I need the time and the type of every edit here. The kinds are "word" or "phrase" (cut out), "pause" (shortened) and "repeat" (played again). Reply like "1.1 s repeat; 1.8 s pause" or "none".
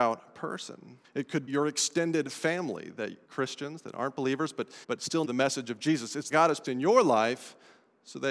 1.0 s pause; 1.5 s word; 3.2 s word; 4.8 s pause; 5.2 s phrase; 6.3 s phrase; 6.6 s word